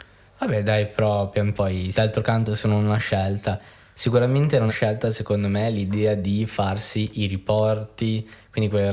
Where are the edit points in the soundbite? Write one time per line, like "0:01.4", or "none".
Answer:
0:01.5
0:01.9
0:04.7